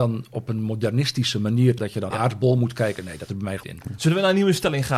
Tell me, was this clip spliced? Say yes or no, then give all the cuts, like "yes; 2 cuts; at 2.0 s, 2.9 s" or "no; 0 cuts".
yes; 4 cuts; at 1.8 s, 2.1 s, 3.3 s, 3.6 s